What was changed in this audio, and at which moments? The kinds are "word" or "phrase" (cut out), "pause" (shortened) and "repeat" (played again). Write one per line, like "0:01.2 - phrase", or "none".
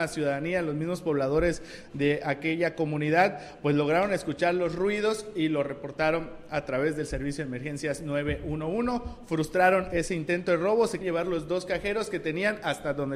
0:09.9 - word
0:11.0 - word